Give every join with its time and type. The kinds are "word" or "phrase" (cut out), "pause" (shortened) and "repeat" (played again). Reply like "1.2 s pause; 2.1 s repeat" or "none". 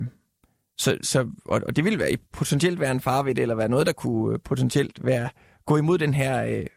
1.0 s word; 5.0 s word